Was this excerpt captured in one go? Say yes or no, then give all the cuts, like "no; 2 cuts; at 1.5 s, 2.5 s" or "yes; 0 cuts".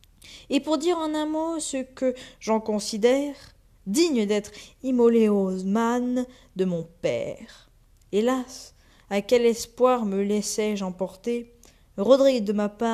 yes; 0 cuts